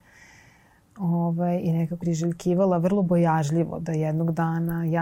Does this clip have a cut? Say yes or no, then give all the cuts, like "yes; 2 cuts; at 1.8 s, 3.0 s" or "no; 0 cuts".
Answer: yes; 1 cut; at 2.0 s